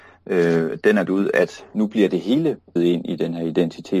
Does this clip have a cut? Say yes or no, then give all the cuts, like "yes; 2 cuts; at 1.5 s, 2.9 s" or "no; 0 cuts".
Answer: yes; 2 cuts; at 1.1 s, 2.8 s